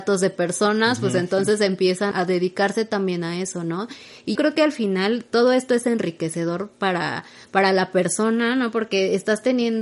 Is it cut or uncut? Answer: cut